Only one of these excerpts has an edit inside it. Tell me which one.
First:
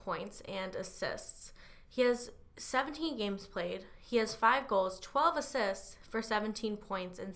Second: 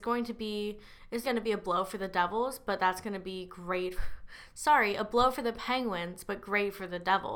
second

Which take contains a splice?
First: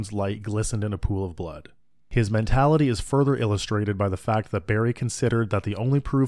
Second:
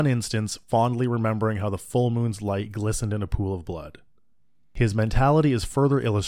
first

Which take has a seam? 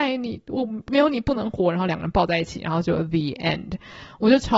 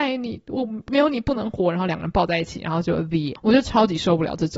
second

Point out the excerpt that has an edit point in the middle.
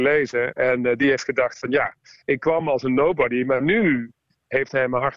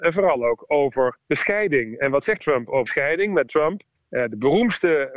second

